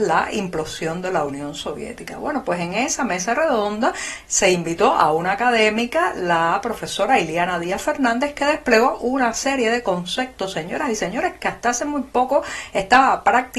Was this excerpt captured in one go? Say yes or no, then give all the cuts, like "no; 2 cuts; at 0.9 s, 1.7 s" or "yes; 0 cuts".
yes; 0 cuts